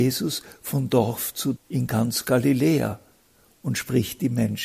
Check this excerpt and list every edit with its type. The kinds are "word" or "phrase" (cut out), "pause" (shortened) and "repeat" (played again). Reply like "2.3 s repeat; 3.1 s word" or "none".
1.6 s word